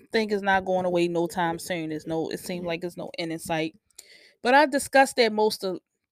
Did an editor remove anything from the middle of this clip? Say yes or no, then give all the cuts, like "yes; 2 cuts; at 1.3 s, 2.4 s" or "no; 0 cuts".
no; 0 cuts